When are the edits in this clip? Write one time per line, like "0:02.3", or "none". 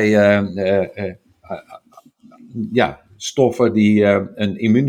0:03.1